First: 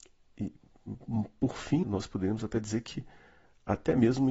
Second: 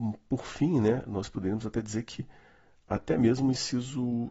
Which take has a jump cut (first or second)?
first